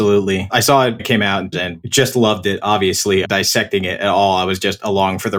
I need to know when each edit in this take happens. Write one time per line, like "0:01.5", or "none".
0:01.0
0:01.5
0:03.2